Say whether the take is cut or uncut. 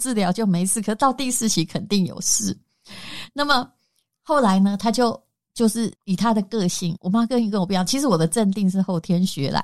cut